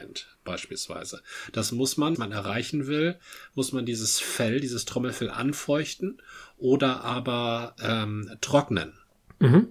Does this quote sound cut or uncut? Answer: cut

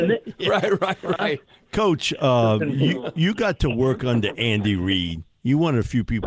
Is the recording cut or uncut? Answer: uncut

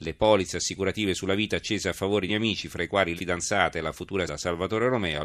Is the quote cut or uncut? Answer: cut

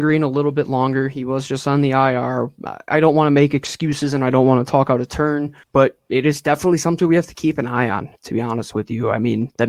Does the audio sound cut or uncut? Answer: cut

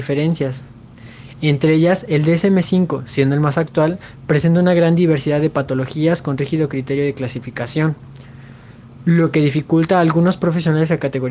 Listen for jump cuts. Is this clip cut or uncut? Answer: uncut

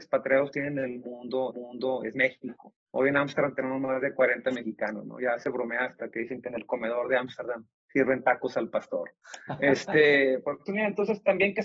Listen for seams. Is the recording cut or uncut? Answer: cut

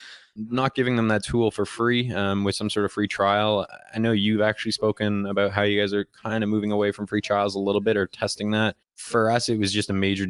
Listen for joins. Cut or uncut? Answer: uncut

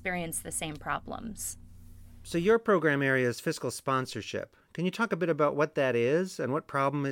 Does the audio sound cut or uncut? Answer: uncut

